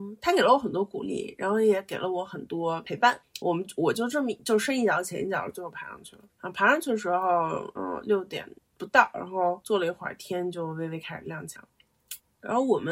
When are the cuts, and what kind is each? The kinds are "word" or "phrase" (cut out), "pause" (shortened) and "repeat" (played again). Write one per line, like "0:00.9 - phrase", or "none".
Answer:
none